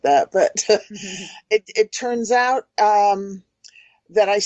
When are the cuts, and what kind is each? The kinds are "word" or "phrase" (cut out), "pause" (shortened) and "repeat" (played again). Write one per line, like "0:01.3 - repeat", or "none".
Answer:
none